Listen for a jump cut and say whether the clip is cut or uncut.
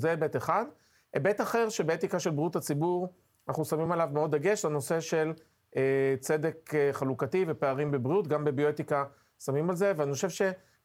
uncut